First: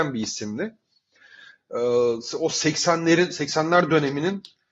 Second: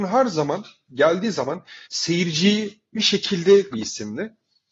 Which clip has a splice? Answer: second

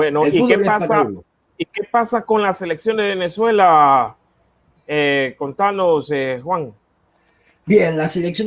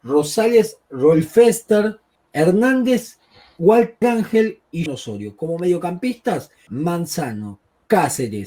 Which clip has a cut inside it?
second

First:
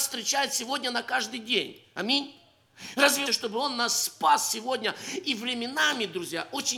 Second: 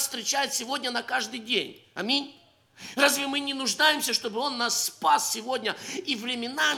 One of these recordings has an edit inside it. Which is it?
first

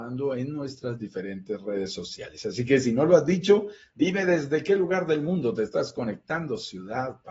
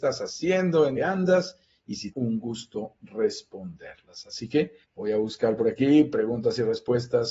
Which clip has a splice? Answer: second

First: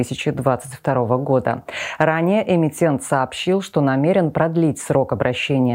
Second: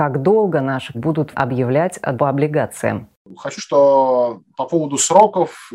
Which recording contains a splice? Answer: second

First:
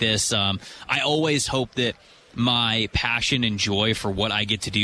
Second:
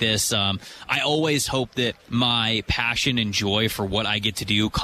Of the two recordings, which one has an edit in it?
second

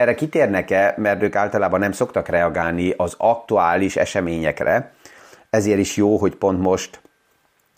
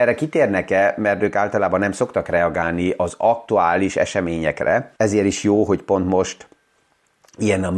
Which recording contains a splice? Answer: second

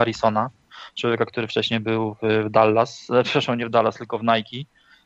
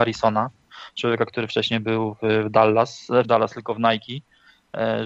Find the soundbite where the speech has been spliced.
second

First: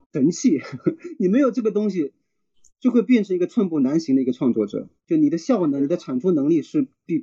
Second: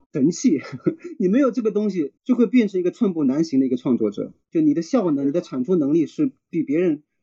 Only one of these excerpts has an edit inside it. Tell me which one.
second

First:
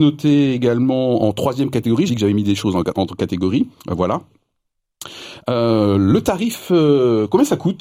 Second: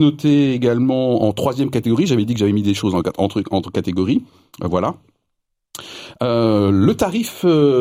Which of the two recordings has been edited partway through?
first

